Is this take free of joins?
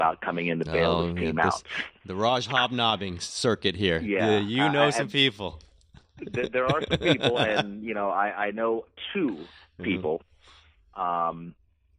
yes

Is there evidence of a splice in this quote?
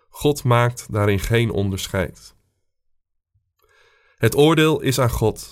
no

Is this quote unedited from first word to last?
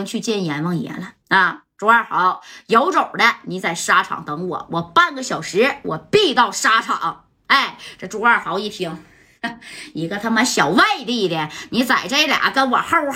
no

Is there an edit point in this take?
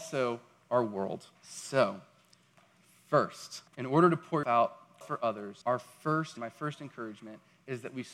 yes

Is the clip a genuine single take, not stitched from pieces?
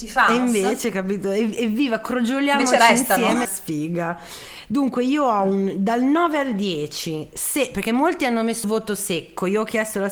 no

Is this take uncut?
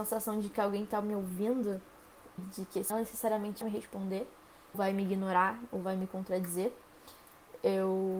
no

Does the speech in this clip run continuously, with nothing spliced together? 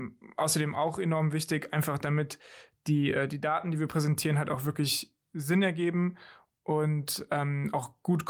yes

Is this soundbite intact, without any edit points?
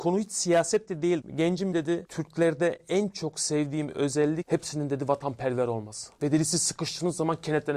no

